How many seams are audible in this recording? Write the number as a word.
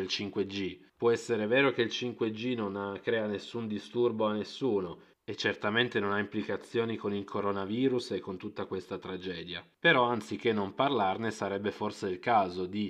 zero